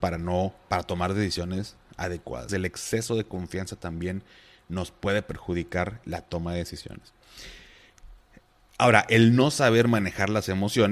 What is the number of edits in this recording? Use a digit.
2